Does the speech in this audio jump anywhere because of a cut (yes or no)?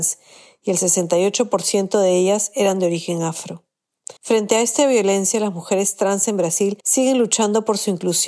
yes